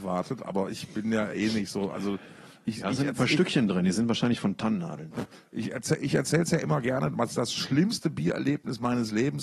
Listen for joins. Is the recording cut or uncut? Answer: uncut